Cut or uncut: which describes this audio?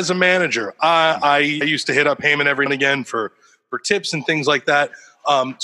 cut